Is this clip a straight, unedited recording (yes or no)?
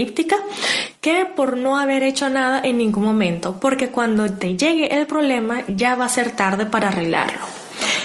yes